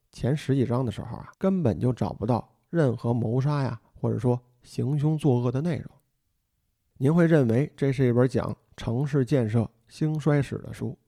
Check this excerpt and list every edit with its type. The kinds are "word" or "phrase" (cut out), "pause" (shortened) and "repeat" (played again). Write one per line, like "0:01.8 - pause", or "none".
0:01.3 - pause